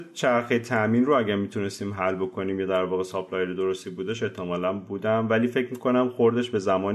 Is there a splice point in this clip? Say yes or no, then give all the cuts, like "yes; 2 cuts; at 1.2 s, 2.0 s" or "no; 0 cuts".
no; 0 cuts